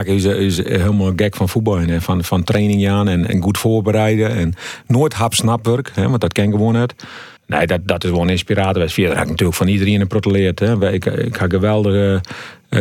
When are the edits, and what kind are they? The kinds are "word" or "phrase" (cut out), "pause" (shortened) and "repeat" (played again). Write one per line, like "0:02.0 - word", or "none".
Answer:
0:07.4 - pause